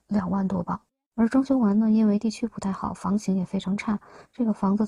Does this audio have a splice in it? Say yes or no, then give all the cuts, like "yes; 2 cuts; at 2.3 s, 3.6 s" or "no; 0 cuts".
yes; 1 cut; at 0.9 s